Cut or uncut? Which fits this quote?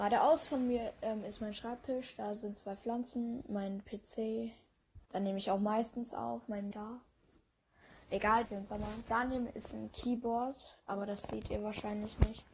cut